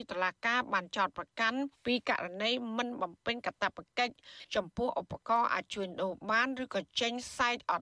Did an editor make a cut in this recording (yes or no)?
yes